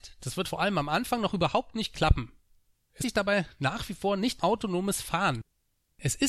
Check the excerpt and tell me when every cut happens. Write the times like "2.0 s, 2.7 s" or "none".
3.0 s, 4.4 s